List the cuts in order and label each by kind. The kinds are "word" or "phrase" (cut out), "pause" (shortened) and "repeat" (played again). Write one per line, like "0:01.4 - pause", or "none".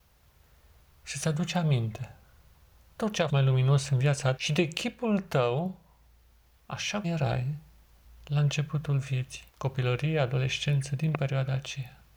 0:03.0 - word
0:03.3 - word
0:04.4 - word
0:07.0 - word
0:08.0 - pause
0:09.5 - pause

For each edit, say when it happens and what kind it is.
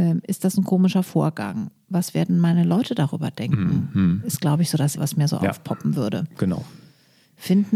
0:05.0 - word

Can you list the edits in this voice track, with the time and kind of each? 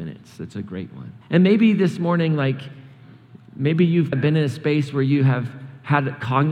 0:01.2 - pause
0:03.5 - pause
0:04.1 - word

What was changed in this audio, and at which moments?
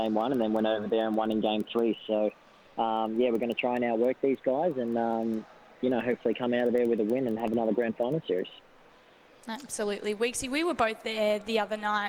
none

